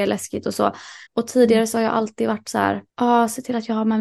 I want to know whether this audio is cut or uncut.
cut